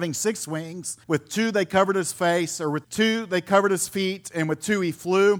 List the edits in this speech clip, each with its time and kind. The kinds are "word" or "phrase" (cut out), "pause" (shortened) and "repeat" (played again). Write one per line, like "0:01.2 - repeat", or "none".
0:01.0 - pause
0:02.8 - word